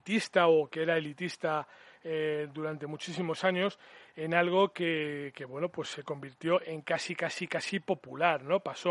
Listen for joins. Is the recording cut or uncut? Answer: uncut